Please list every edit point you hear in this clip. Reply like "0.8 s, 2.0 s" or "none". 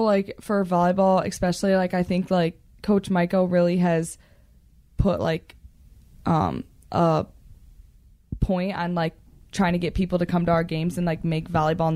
none